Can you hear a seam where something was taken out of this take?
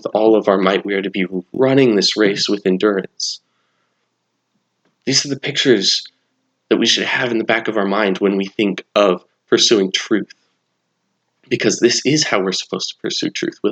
no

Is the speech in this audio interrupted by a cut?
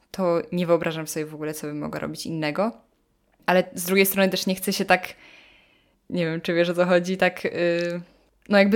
no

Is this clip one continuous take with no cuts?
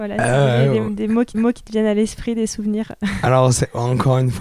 no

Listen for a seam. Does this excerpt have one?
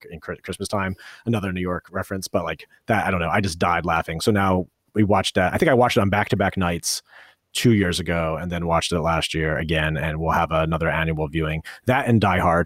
no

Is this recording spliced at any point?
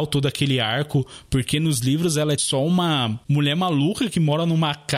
yes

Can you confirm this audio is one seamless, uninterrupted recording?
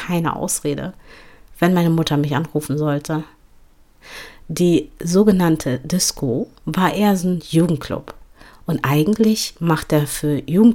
yes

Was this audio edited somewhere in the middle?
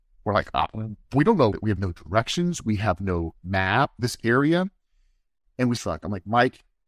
yes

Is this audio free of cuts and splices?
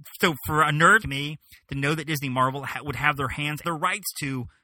no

